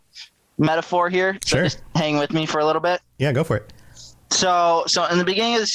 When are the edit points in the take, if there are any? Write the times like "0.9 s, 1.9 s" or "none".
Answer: 4.2 s